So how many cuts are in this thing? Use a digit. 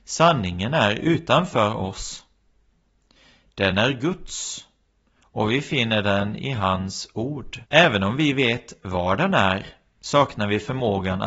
1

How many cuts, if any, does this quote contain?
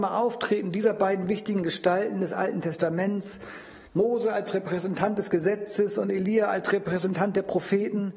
1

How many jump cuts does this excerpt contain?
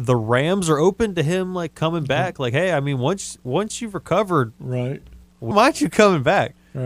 1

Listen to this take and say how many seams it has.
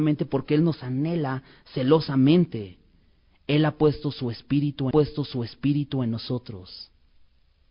1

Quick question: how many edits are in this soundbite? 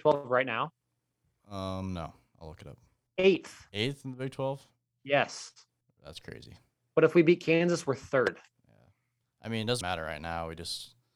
1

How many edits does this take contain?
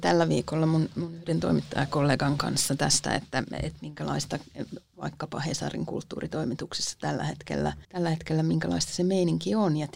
1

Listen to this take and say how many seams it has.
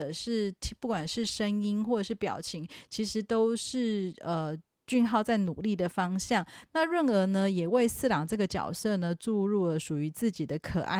0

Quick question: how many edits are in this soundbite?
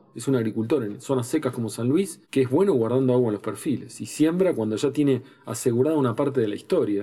1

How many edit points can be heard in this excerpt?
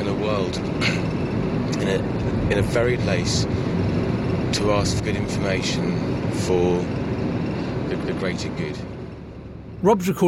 3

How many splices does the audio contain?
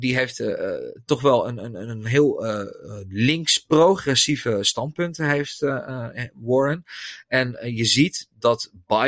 0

